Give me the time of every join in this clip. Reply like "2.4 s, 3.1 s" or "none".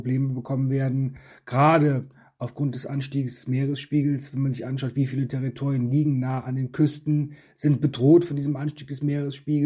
none